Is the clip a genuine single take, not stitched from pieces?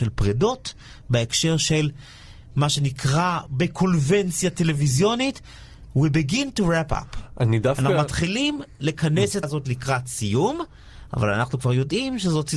no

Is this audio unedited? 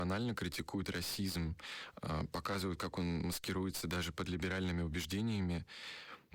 yes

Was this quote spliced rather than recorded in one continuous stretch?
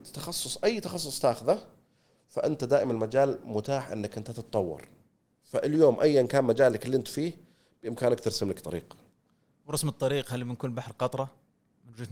no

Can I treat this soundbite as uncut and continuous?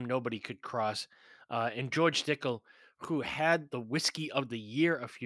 yes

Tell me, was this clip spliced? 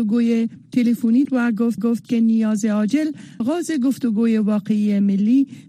yes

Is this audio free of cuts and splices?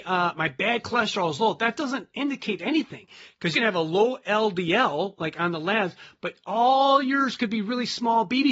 no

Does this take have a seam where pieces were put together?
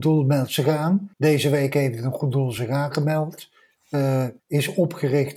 yes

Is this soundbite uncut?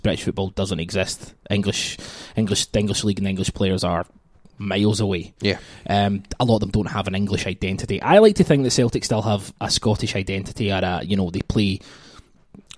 yes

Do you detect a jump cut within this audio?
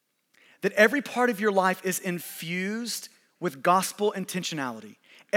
no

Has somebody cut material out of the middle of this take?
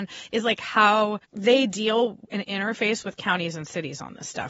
yes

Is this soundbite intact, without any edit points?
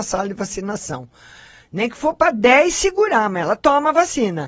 yes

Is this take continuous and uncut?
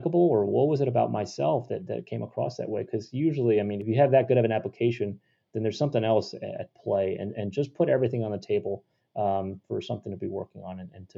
yes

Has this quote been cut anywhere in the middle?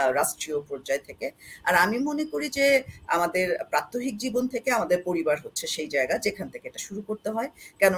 no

